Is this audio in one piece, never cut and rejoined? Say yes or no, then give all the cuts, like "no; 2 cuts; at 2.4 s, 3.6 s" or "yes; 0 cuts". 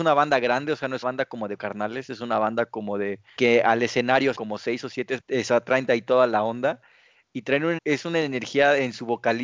no; 7 cuts; at 1.0 s, 1.6 s, 3.4 s, 4.4 s, 5.2 s, 5.9 s, 7.8 s